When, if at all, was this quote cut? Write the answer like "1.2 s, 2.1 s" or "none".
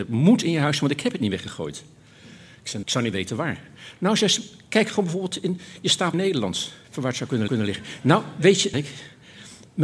2.8 s, 6.1 s, 6.8 s, 7.5 s, 8.7 s